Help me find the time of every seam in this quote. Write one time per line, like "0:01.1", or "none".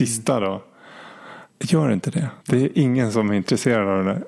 0:01.5
0:02.4